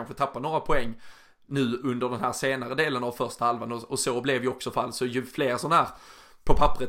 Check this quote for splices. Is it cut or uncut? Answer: uncut